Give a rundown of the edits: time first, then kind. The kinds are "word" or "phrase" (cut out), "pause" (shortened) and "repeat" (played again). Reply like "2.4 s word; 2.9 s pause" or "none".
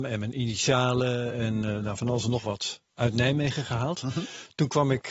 2.9 s pause